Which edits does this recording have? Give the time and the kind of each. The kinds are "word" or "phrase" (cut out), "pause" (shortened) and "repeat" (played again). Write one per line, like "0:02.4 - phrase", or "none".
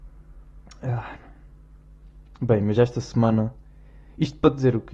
none